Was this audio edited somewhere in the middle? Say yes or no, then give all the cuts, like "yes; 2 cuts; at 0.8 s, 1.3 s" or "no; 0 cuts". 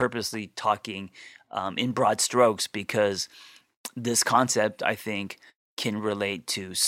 no; 0 cuts